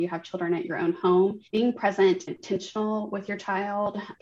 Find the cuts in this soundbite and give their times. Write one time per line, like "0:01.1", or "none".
0:01.5
0:02.3

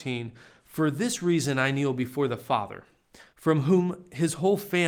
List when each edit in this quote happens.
0:03.3

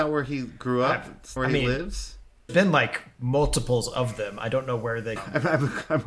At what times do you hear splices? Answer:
0:01.4
0:02.5
0:05.2

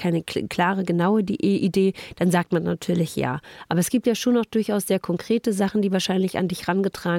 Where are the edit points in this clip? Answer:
none

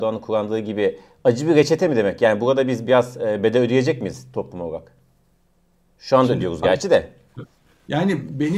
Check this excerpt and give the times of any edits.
none

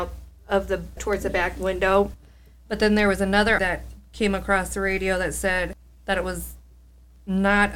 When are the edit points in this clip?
0:01.0
0:03.6

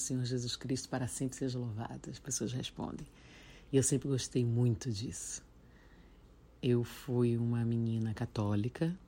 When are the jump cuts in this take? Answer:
none

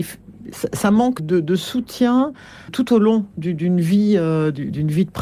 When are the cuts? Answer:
0:01.2
0:02.7

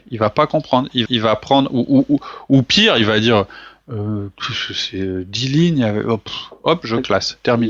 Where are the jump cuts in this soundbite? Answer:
0:01.1

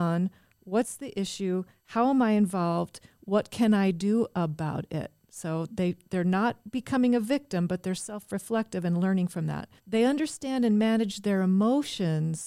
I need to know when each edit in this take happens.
0:09.8

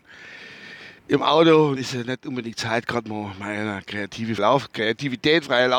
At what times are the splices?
0:01.0
0:01.8
0:04.4

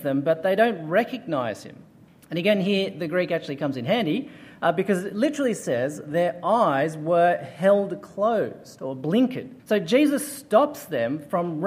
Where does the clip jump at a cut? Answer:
0:02.1
0:09.6

